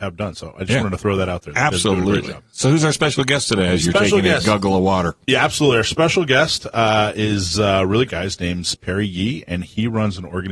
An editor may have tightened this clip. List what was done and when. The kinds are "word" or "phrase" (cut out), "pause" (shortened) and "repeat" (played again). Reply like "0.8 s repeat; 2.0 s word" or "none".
8.1 s word; 8.7 s word